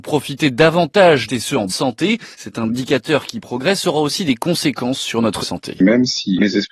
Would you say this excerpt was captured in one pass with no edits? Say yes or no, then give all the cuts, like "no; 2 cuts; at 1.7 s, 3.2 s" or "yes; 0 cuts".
no; 4 cuts; at 1.3 s, 1.7 s, 2.3 s, 5.4 s